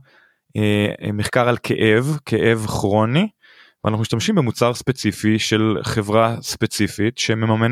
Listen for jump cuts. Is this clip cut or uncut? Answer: uncut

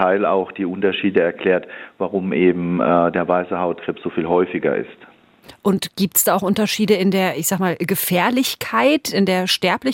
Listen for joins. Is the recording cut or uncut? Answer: uncut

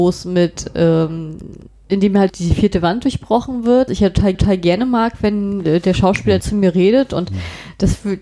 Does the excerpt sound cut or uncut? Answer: cut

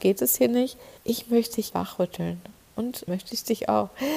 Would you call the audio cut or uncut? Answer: cut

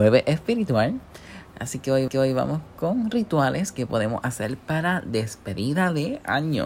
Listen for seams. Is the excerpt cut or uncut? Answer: cut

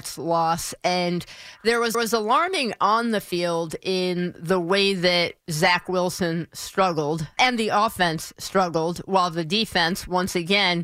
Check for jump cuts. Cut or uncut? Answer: cut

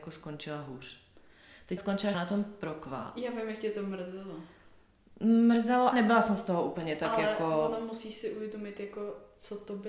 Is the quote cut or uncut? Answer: cut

